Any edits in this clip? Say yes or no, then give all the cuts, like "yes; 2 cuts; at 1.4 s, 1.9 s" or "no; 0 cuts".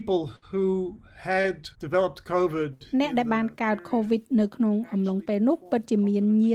yes; 1 cut; at 1.7 s